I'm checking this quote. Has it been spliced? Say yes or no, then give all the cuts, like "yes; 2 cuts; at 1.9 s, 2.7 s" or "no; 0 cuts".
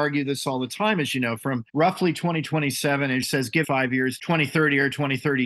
yes; 4 cuts; at 1.7 s, 3.2 s, 3.6 s, 4.2 s